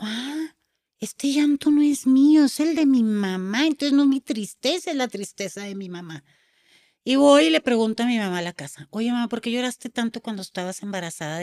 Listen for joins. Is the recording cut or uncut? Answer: uncut